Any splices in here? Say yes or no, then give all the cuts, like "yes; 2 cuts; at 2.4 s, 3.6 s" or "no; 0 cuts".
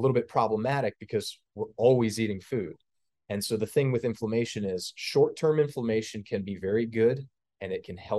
no; 0 cuts